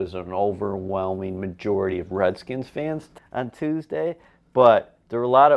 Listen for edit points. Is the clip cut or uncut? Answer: uncut